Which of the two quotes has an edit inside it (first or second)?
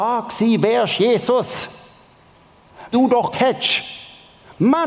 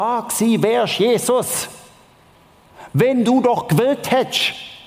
first